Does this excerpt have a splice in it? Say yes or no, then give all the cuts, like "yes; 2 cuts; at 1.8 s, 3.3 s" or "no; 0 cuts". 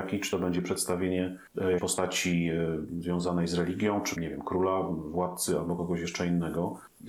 yes; 2 cuts; at 1.8 s, 4.2 s